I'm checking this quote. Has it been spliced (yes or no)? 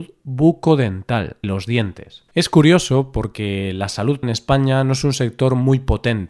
yes